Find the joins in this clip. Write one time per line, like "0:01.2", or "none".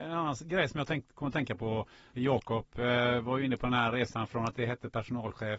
none